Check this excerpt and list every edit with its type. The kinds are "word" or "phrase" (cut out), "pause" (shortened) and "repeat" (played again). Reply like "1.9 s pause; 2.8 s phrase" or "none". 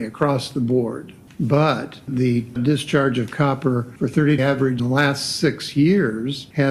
2.5 s word; 4.4 s word; 4.8 s word